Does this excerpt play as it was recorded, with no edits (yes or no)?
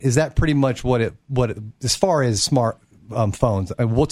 yes